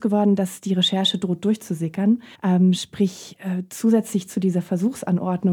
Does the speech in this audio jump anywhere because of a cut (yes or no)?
yes